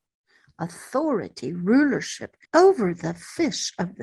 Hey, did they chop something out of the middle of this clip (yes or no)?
yes